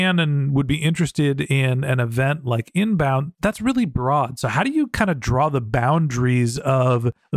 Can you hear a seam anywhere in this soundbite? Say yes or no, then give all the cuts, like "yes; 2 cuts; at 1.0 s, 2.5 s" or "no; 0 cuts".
no; 0 cuts